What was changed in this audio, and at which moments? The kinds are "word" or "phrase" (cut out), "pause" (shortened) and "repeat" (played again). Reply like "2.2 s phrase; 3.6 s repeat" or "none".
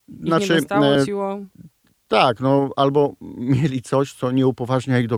0.9 s word